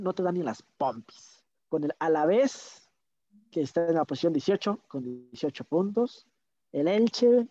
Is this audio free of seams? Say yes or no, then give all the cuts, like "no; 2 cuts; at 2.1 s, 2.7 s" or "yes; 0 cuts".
yes; 0 cuts